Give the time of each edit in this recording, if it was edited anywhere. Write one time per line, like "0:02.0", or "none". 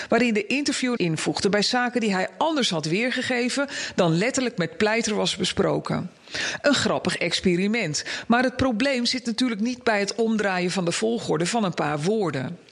0:01.0